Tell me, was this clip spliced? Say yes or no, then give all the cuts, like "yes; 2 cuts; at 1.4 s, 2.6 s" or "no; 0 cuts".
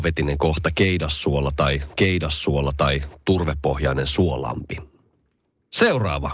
yes; 1 cut; at 2.0 s